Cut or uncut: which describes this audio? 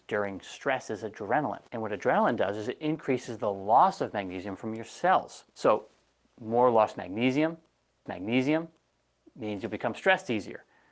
cut